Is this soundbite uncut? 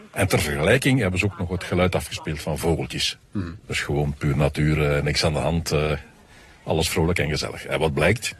yes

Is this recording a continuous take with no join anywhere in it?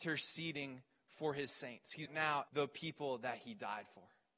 no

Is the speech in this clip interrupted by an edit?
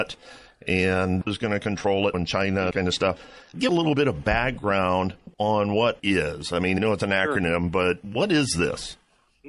yes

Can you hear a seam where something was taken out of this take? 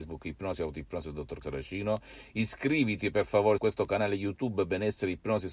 yes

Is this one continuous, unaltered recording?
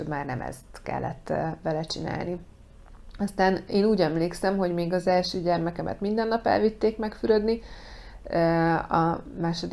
yes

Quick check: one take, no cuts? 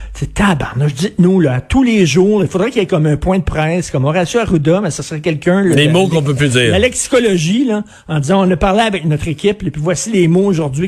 yes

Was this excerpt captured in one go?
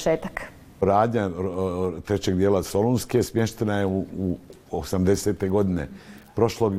yes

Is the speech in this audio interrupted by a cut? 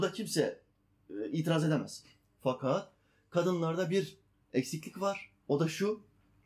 no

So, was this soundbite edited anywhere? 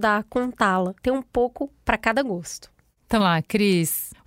yes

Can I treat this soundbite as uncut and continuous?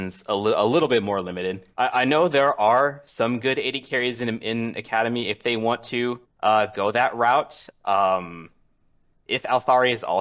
no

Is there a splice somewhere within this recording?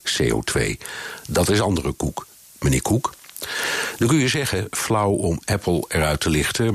no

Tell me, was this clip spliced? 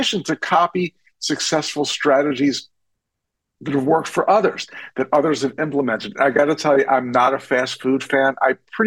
no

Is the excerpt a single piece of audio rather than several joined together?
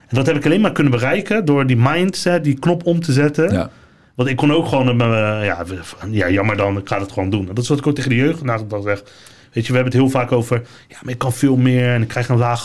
yes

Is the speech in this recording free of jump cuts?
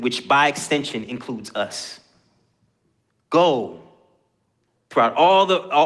yes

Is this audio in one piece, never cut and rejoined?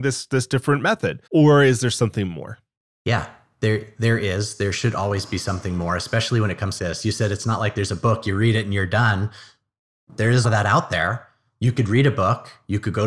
no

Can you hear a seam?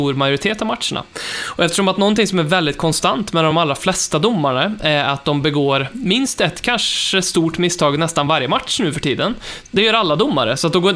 no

